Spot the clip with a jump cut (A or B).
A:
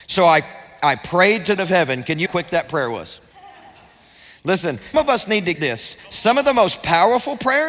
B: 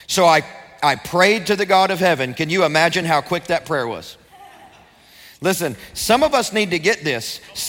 A